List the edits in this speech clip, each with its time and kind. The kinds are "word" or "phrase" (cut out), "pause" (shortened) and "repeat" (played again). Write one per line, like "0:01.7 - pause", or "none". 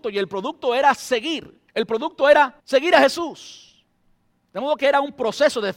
0:01.7 - pause
0:02.6 - pause